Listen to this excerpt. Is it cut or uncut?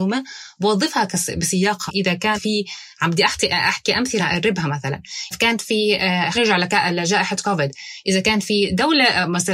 cut